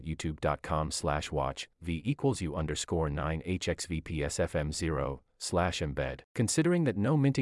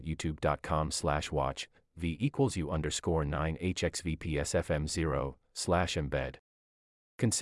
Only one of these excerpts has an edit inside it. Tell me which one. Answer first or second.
first